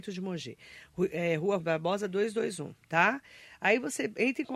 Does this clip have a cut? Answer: yes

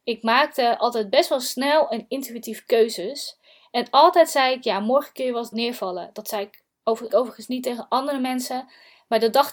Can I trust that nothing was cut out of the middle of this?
no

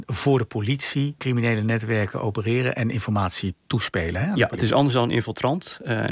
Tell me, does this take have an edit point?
yes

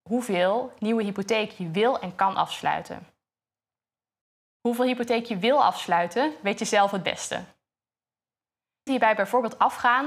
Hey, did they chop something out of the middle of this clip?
yes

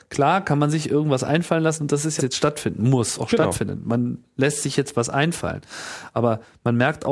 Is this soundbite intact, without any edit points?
no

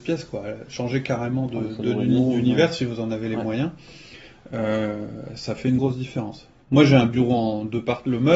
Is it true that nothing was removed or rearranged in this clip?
no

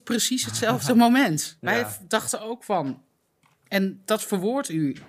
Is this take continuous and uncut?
yes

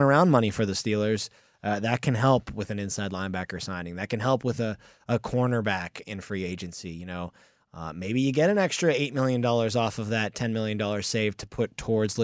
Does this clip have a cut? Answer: no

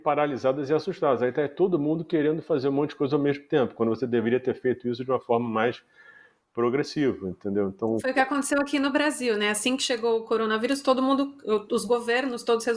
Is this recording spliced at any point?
no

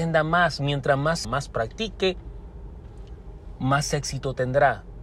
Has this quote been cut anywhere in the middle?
yes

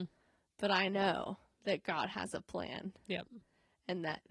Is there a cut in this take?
no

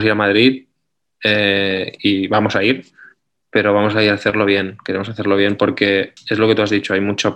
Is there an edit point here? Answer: no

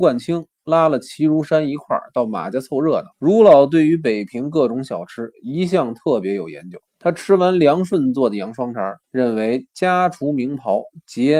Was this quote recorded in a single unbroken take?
no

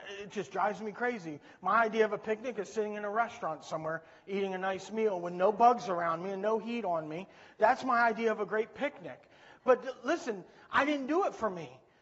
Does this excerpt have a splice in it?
no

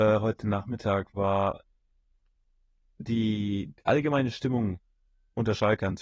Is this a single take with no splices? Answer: yes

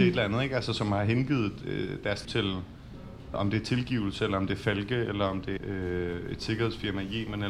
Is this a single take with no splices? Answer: no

